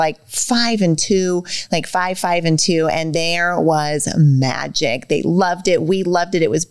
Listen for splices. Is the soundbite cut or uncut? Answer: uncut